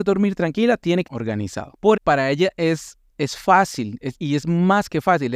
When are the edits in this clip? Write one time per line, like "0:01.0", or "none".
0:01.1
0:02.0
0:03.1